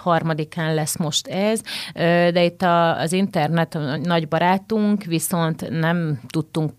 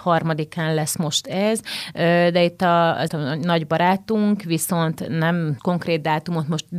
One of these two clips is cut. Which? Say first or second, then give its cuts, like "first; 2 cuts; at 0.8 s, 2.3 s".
second; 2 cuts; at 3.1 s, 5.6 s